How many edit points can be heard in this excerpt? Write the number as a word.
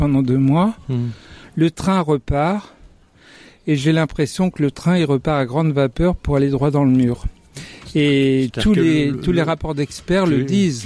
zero